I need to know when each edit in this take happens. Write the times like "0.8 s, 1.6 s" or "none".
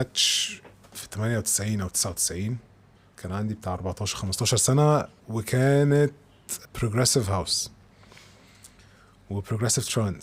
3.0 s, 5.2 s